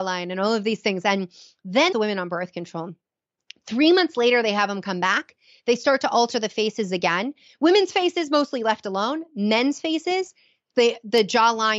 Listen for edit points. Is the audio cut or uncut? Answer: cut